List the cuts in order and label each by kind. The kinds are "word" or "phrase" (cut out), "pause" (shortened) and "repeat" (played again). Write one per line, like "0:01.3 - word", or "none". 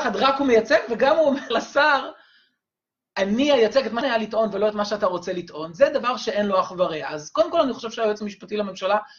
0:01.5 - phrase
0:04.0 - word